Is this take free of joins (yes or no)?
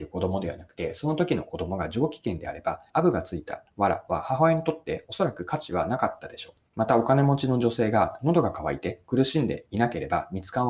no